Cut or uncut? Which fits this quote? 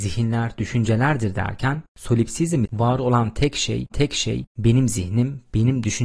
cut